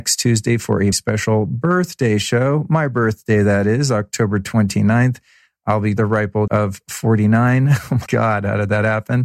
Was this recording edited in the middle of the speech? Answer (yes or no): yes